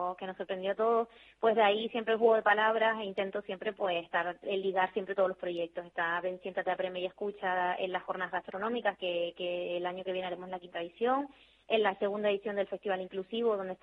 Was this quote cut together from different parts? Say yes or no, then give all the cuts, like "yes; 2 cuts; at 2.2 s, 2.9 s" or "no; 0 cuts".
no; 0 cuts